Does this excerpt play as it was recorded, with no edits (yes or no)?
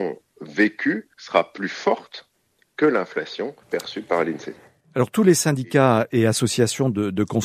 no